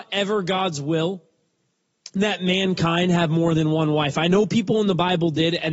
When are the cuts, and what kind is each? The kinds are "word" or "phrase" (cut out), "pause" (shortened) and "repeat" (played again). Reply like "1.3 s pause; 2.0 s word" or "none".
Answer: none